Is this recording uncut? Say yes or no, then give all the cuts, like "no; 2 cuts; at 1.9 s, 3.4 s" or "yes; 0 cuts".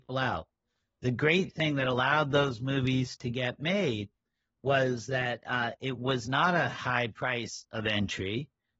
yes; 0 cuts